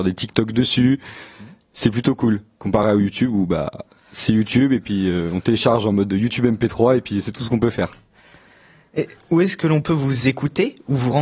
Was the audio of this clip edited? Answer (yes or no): no